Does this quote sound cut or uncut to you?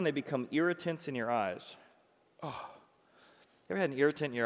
uncut